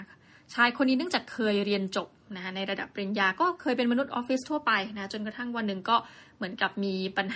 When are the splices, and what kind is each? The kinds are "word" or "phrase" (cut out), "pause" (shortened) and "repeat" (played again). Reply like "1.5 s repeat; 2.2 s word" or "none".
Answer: none